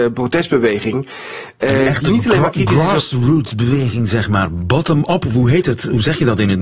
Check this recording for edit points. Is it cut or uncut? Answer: uncut